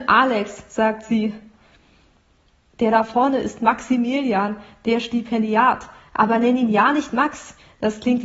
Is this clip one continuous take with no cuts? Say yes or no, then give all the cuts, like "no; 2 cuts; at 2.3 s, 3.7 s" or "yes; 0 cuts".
yes; 0 cuts